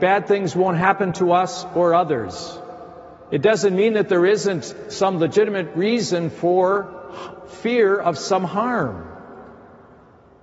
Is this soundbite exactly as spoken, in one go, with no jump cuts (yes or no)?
yes